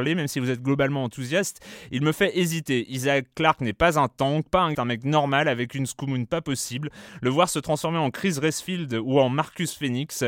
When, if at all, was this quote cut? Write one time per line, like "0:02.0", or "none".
0:04.7